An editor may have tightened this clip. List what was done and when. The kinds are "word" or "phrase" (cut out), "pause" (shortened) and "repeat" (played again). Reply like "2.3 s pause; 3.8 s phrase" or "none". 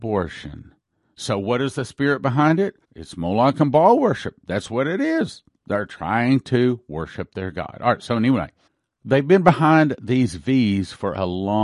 2.8 s pause; 8.7 s pause

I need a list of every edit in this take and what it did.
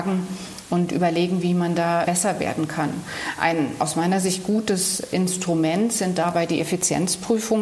2.0 s word

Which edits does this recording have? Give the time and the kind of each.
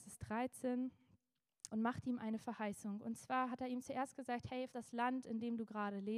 1.7 s word; 4.7 s word

